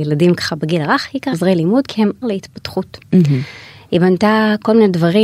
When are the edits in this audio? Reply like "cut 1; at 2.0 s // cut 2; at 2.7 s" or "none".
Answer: cut 1; at 1.3 s // cut 2; at 2.2 s